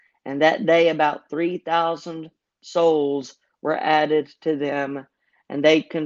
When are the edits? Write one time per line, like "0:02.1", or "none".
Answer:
none

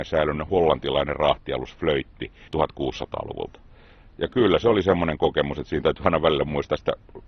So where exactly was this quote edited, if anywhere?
0:02.5

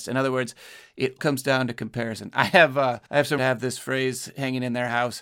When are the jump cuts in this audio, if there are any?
0:01.2
0:03.0
0:03.4

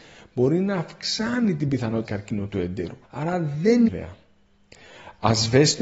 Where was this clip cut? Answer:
0:02.1
0:03.0
0:03.9

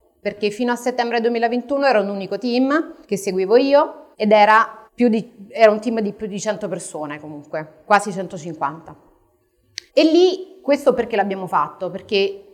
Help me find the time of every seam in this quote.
0:03.0
0:04.1
0:04.9
0:09.9

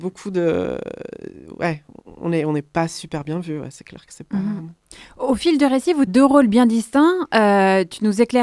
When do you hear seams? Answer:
0:06.1

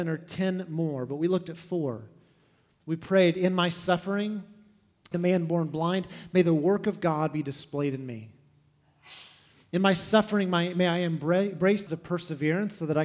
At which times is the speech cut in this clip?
0:05.1
0:11.9

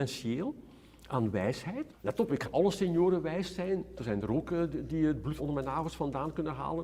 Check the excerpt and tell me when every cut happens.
0:01.9
0:02.4
0:05.4

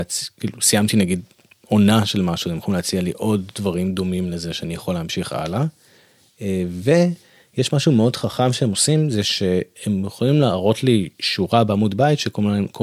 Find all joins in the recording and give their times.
none

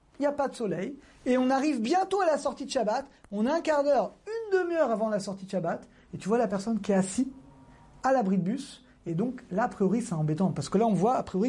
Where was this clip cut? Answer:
none

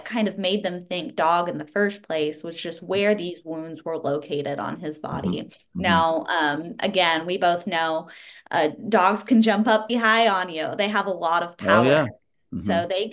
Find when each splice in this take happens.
0:09.9

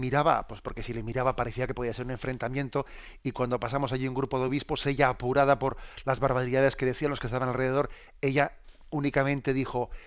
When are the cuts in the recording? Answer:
none

